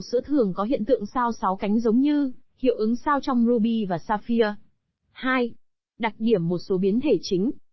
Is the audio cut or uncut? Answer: uncut